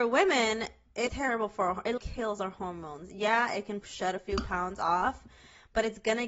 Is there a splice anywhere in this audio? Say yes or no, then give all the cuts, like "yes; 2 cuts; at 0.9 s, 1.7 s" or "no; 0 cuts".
yes; 3 cuts; at 1.1 s, 2.0 s, 3.8 s